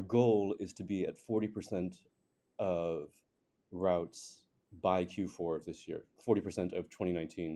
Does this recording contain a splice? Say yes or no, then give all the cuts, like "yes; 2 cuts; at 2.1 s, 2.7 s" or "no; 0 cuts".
no; 0 cuts